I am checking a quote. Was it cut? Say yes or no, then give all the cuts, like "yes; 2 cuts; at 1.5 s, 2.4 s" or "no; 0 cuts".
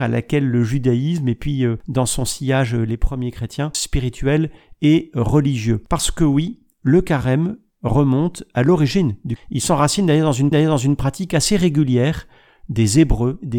yes; 3 cuts; at 3.7 s, 9.4 s, 10.5 s